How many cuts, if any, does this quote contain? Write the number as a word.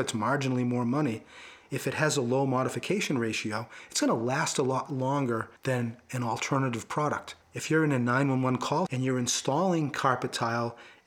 three